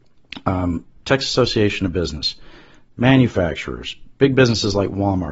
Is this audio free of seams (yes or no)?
yes